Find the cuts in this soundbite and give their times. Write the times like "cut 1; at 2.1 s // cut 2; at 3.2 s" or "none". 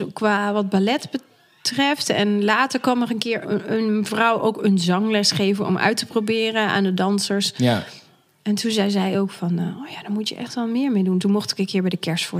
cut 1; at 3.4 s